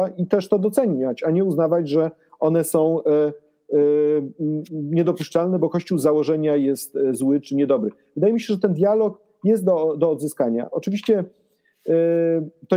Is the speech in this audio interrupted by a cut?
yes; 1 cut; at 7.4 s

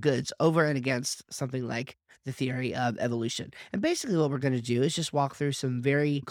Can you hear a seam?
no; 0 cuts

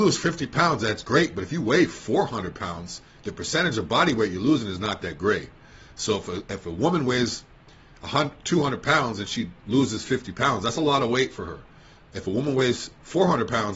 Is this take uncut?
yes; 0 cuts

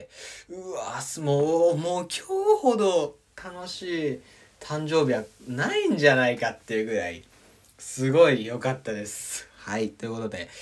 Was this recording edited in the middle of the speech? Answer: no; 0 cuts

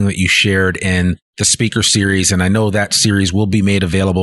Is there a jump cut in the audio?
no; 0 cuts

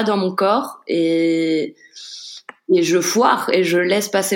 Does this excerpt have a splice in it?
no; 0 cuts

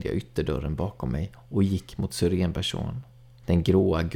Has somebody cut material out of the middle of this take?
no; 0 cuts

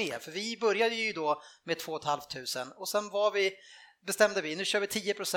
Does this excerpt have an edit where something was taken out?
no; 0 cuts

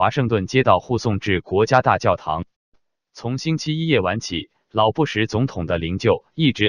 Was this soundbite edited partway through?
no; 0 cuts

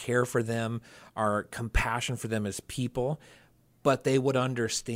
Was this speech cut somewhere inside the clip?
no; 0 cuts

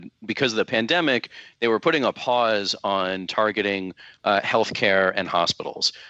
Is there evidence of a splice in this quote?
no; 0 cuts

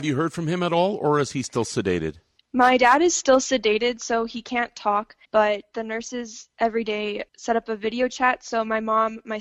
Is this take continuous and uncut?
no; 3 cuts; at 2.4 s, 5.2 s, 7.3 s

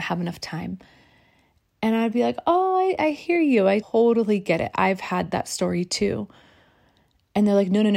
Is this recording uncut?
no; 1 cut; at 3.8 s

